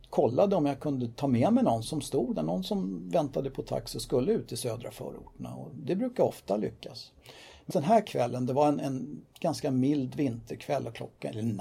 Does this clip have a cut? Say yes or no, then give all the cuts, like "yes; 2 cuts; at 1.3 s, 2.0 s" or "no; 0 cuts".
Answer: yes; 2 cuts; at 1.8 s, 7.7 s